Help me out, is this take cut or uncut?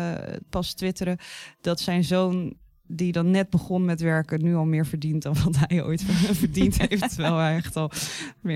uncut